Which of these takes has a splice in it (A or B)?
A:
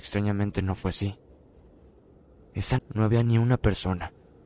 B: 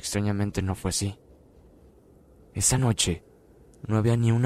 A